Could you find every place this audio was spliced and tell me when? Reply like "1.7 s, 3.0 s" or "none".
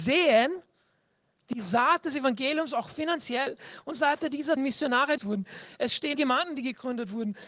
3.9 s, 4.6 s, 5.2 s, 6.1 s